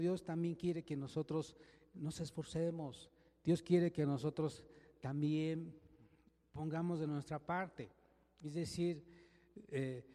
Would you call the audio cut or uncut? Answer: uncut